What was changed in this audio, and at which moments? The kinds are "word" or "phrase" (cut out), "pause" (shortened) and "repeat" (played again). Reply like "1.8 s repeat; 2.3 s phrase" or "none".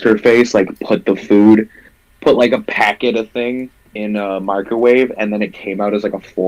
none